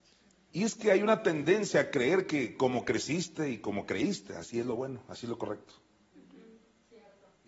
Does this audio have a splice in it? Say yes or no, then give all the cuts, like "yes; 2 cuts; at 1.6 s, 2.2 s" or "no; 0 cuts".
no; 0 cuts